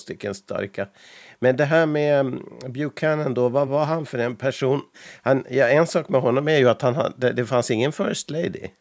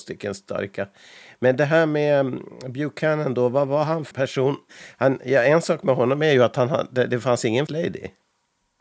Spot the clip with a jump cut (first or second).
second